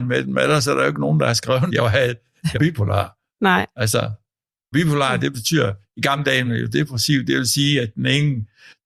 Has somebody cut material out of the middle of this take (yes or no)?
yes